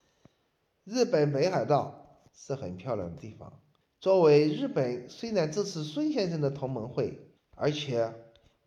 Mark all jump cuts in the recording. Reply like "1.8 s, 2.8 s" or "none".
2.3 s, 3.8 s, 7.4 s